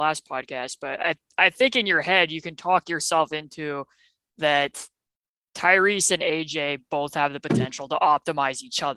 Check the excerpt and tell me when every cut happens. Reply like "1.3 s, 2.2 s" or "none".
none

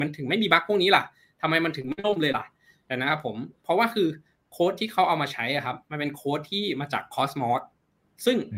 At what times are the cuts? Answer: none

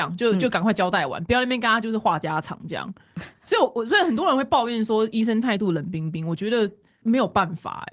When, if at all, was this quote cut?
none

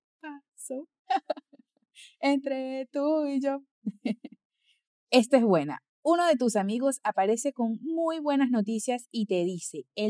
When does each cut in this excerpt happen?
none

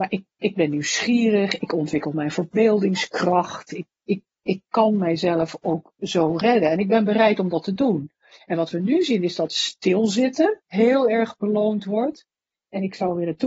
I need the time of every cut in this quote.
10.6 s

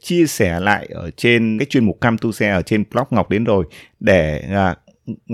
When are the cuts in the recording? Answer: 1.6 s

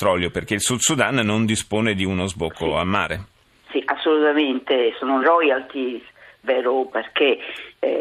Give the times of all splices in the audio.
5.2 s, 6.4 s, 6.9 s

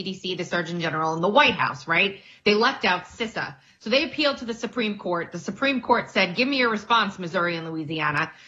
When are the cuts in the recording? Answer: none

